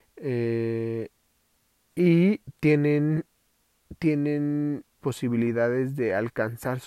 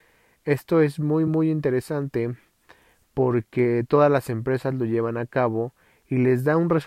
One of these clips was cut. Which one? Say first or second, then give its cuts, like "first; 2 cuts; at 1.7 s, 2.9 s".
first; 1 cut; at 5.0 s